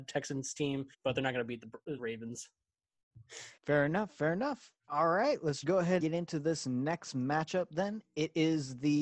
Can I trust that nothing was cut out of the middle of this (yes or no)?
no